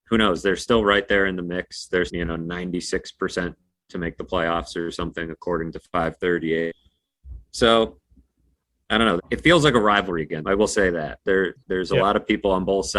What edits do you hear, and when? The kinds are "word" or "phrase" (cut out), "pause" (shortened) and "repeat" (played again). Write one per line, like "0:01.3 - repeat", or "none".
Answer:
0:02.1 - word
0:07.4 - pause
0:09.2 - word
0:10.4 - word
0:11.6 - pause